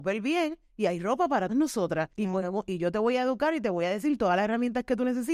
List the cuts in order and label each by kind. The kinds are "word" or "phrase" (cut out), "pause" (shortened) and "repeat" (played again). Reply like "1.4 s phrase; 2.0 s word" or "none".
1.5 s word; 2.1 s pause